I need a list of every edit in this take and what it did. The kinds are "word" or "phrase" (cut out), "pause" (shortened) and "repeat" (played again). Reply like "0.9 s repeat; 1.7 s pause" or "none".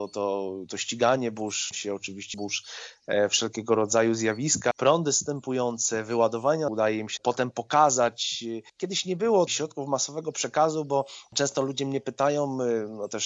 1.7 s word; 2.3 s word; 4.7 s word; 6.7 s phrase; 7.2 s word; 8.7 s pause; 9.5 s word